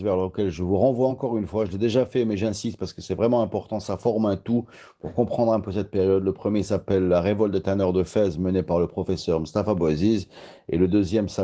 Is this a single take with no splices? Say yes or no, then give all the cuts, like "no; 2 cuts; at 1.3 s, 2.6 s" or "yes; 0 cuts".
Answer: yes; 0 cuts